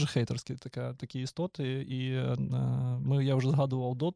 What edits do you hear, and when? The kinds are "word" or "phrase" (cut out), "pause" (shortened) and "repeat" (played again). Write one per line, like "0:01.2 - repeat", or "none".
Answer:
none